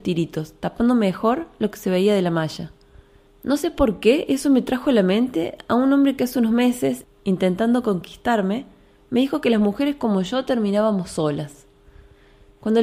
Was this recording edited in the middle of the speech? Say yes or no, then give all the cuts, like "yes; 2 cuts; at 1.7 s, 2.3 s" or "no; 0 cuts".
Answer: no; 0 cuts